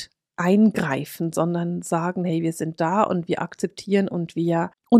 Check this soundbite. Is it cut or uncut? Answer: uncut